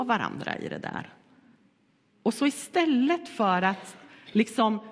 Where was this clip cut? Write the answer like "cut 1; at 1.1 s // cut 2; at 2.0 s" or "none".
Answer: none